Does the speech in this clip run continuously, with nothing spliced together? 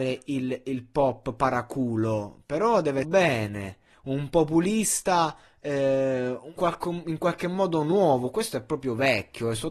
no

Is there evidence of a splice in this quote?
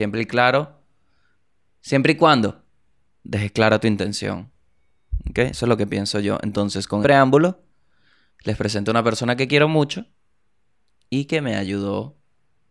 yes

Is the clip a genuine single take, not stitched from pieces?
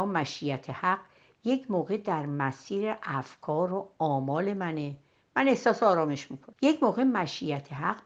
yes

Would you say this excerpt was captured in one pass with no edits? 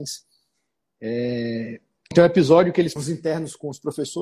no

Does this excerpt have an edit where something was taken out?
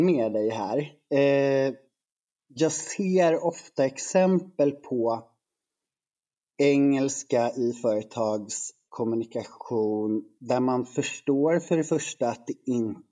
no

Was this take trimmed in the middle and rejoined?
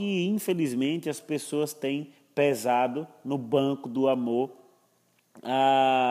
no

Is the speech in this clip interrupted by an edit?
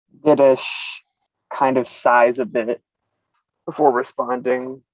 no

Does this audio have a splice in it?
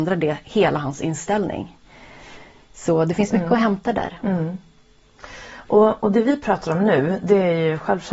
no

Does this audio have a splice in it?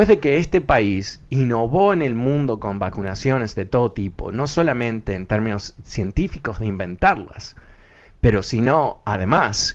no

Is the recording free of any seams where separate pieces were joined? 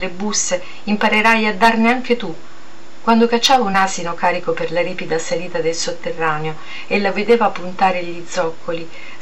yes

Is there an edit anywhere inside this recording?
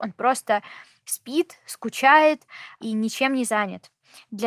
no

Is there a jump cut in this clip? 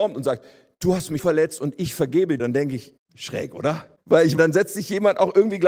yes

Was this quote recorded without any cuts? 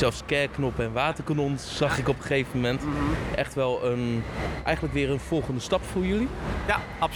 yes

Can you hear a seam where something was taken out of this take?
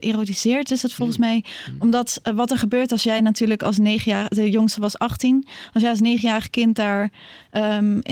no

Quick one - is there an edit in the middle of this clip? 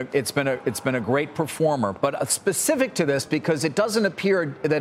no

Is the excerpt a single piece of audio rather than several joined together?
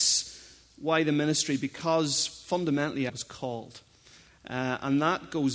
no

